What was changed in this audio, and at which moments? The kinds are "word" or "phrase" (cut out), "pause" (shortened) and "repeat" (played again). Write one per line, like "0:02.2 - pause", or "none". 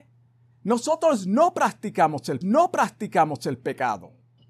0:02.4 - repeat